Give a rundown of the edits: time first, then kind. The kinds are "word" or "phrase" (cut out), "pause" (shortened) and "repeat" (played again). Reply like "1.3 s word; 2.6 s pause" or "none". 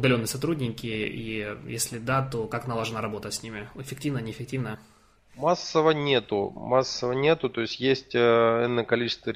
none